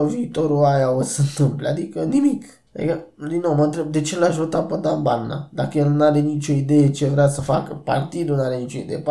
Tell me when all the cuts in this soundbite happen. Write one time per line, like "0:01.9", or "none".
0:02.7